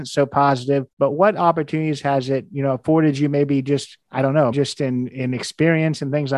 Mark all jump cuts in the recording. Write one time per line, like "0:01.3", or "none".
0:00.9
0:04.0
0:04.5